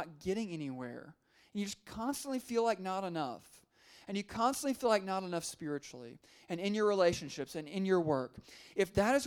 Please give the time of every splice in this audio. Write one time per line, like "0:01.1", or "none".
none